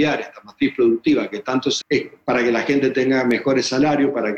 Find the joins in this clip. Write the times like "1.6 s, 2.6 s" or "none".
1.8 s